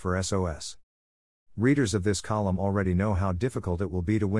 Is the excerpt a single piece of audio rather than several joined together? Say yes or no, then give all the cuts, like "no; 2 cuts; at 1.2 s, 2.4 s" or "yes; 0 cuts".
yes; 0 cuts